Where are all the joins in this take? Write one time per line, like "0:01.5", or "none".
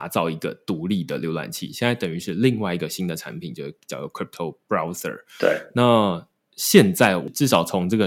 none